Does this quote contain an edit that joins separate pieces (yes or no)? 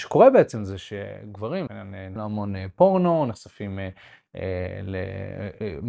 yes